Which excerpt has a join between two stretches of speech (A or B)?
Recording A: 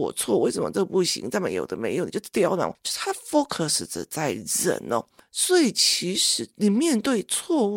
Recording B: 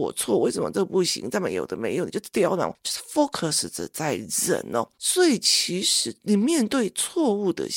B